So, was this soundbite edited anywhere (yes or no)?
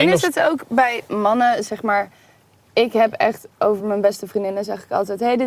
no